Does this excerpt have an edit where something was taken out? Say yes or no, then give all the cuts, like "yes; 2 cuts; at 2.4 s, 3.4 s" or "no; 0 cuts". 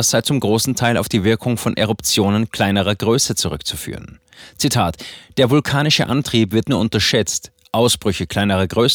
yes; 1 cut; at 6.6 s